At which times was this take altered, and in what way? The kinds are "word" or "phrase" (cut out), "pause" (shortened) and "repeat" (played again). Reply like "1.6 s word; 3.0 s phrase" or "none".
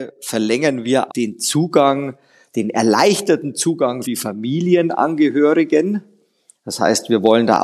1.1 s word; 4.0 s word